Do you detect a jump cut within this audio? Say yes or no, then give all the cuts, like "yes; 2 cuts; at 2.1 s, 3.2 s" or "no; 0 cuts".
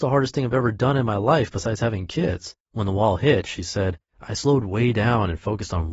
yes; 2 cuts; at 2.6 s, 4.1 s